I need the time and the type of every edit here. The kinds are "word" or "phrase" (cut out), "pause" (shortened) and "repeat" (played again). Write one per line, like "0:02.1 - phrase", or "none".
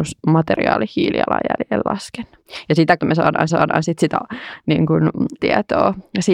0:03.0 - word
0:03.5 - repeat
0:05.4 - word